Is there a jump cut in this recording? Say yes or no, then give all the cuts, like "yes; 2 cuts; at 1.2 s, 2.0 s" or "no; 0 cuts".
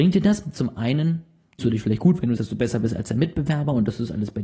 yes; 2 cuts; at 1.6 s, 2.4 s